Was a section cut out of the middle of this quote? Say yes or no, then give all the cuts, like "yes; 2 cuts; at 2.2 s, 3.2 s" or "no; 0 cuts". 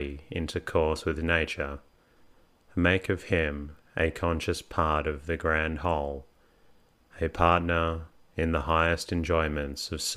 no; 0 cuts